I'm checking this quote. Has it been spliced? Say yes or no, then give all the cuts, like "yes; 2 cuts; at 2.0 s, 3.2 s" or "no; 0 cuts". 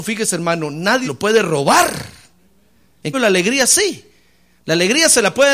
yes; 2 cuts; at 1.0 s, 3.1 s